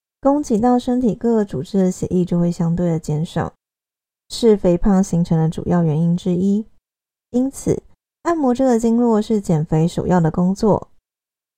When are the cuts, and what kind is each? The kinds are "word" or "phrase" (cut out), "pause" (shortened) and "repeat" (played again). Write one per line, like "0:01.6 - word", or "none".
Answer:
none